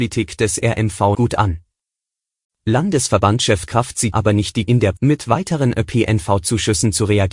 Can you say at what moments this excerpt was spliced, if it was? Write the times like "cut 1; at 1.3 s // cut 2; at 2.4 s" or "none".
cut 1; at 1.1 s // cut 2; at 3.7 s // cut 3; at 4.1 s // cut 4; at 4.6 s // cut 5; at 5.0 s